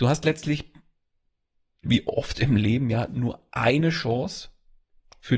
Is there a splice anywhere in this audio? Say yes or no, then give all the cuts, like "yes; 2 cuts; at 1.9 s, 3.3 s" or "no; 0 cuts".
no; 0 cuts